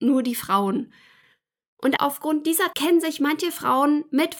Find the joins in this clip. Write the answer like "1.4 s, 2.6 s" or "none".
2.0 s, 2.7 s